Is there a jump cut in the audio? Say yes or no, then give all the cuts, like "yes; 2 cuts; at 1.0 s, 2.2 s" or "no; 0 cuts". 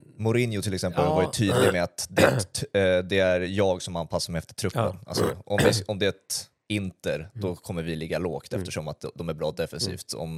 no; 0 cuts